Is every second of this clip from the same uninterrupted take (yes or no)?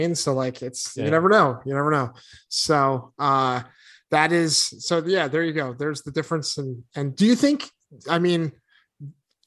yes